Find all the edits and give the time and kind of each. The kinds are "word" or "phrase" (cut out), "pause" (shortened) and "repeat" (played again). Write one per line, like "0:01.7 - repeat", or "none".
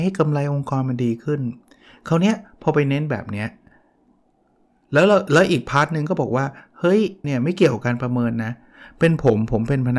0:07.2 - word